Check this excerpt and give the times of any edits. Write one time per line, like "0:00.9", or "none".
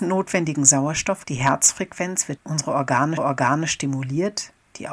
0:01.2
0:02.4
0:03.2